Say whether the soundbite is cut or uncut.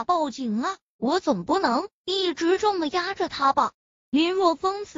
cut